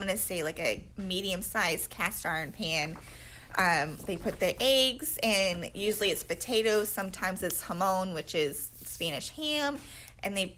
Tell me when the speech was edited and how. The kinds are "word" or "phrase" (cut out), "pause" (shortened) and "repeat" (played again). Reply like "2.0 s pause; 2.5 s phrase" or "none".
0.9 s pause